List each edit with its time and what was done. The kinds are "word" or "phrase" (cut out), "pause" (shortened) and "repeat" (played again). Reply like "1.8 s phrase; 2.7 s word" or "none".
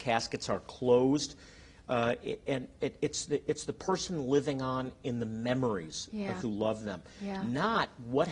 6.4 s word